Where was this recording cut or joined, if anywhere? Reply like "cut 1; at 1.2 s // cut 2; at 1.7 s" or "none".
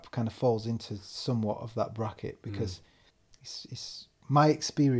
cut 1; at 3.1 s